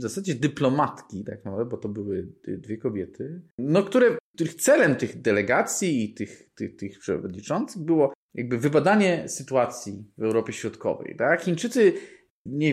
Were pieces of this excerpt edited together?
yes; 1 cut; at 3.5 s

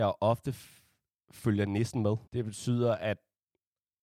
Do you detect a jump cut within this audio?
yes; 1 cut; at 2.3 s

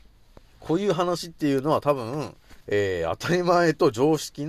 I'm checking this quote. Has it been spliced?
yes; 1 cut; at 2.6 s

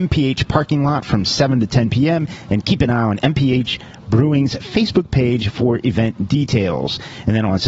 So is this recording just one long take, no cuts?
yes; 0 cuts

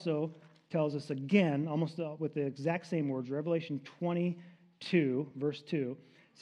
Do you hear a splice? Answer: no; 0 cuts

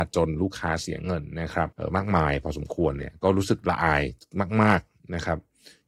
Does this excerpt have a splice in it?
yes; 1 cut; at 1.7 s

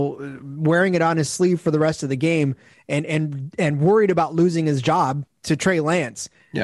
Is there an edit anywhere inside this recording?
no; 0 cuts

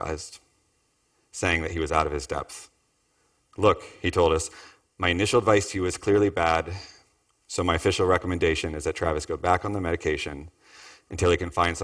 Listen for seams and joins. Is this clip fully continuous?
yes; 0 cuts

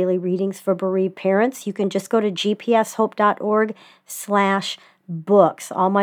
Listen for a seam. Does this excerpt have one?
no; 0 cuts

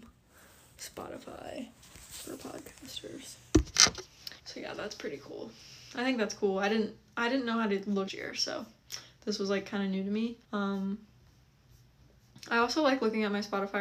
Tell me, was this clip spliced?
yes; 3 cuts; at 4.4 s, 8.1 s, 10.4 s

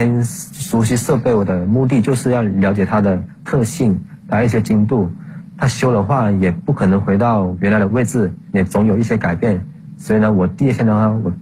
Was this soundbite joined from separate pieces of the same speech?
yes; 1 cut; at 8.4 s

